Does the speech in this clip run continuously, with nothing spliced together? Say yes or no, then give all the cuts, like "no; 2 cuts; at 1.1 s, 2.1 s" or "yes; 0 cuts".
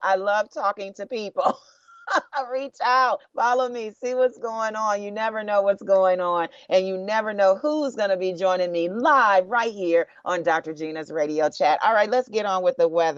no; 1 cut; at 3.2 s